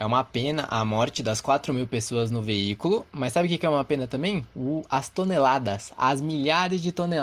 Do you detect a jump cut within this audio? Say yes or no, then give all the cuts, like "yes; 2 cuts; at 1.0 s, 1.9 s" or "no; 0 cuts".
no; 0 cuts